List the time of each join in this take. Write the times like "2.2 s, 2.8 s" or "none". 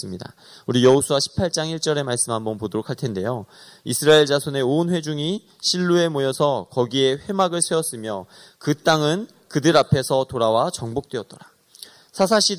none